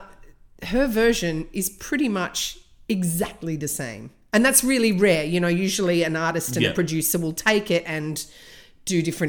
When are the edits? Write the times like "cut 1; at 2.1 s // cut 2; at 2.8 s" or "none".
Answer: none